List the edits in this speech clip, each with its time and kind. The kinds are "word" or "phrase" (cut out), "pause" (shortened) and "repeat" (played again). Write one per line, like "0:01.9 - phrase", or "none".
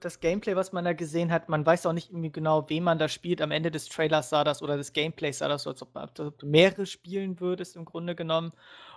none